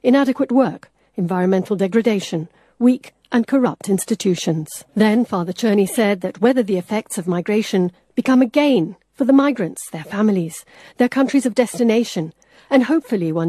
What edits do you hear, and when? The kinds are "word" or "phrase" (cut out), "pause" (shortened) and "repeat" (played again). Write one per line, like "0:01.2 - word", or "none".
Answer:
0:04.9 - pause